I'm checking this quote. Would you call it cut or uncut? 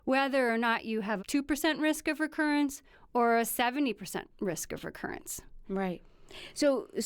cut